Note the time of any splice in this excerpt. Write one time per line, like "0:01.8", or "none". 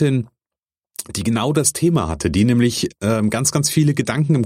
none